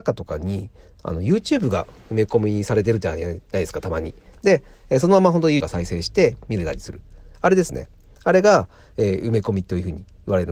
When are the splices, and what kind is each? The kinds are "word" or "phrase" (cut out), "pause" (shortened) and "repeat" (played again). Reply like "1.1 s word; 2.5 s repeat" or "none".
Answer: 5.6 s word